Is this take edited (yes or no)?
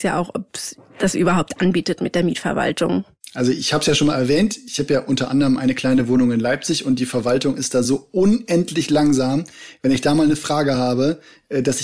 no